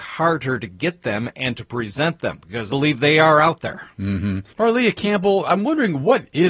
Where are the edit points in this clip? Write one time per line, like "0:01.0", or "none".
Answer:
0:02.7
0:04.5